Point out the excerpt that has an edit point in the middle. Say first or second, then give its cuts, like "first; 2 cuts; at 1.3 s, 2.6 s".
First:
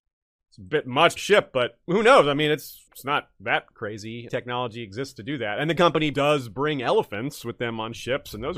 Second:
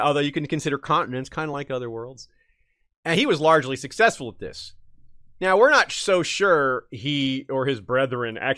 first; 6 cuts; at 1.2 s, 1.8 s, 2.9 s, 4.3 s, 5.8 s, 6.1 s